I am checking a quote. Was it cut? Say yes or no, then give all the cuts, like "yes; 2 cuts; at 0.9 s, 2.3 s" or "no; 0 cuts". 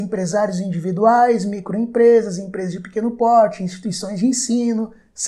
no; 0 cuts